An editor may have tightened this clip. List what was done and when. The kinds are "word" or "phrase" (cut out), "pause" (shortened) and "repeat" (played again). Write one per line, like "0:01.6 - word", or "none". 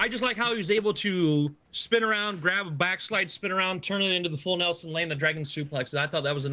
0:01.6 - pause